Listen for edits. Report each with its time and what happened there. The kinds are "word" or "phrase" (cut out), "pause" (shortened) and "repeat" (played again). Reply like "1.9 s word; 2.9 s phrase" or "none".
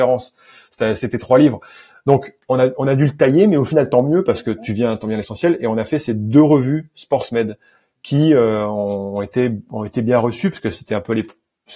none